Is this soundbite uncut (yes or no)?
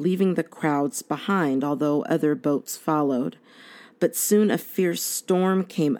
yes